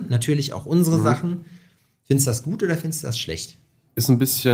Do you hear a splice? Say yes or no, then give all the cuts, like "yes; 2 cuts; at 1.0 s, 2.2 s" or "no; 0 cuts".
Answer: no; 0 cuts